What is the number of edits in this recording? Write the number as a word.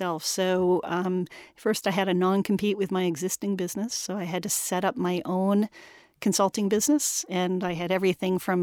zero